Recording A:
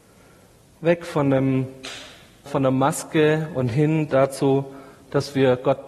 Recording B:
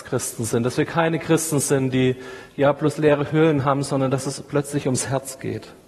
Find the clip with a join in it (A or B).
A